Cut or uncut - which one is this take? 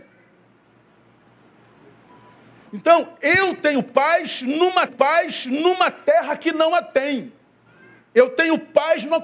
cut